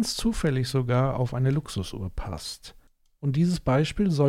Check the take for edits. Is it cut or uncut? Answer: uncut